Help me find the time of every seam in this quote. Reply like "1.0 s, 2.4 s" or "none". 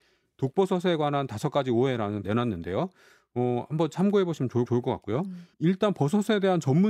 2.2 s, 4.7 s, 5.5 s